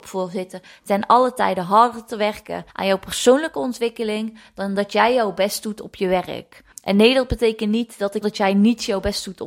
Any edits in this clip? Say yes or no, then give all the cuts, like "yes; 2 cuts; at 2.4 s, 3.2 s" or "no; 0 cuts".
yes; 3 cuts; at 2.7 s, 6.7 s, 8.2 s